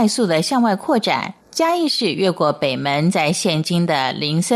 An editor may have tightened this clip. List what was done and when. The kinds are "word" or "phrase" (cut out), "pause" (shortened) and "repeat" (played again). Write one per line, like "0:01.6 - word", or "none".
0:01.4 - pause